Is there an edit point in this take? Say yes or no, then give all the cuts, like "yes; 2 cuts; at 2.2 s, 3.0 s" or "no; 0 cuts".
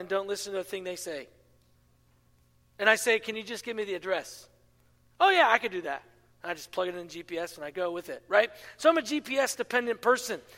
no; 0 cuts